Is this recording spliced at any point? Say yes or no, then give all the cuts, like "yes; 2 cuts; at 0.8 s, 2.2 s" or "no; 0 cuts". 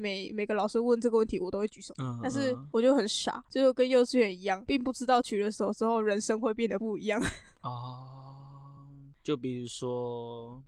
no; 0 cuts